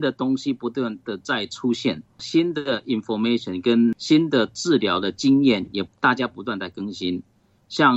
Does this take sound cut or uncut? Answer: uncut